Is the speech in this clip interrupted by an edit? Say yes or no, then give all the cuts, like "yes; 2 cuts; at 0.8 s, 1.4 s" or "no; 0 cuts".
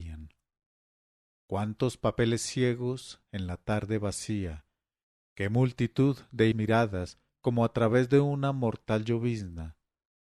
yes; 1 cut; at 6.5 s